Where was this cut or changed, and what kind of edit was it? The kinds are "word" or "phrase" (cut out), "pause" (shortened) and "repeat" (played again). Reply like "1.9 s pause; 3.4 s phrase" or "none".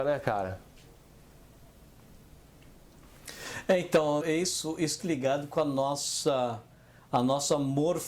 4.2 s word; 5.0 s word